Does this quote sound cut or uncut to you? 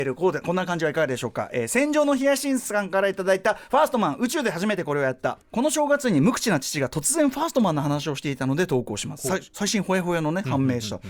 cut